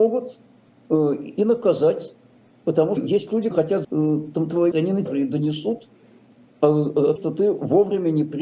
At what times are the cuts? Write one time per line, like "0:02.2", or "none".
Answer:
0:03.0
0:03.5
0:03.8
0:04.7
0:05.1
0:07.2